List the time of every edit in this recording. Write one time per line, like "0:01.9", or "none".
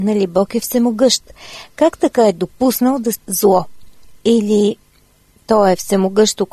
0:03.1